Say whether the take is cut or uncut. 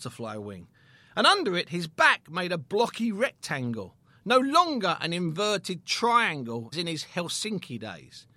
cut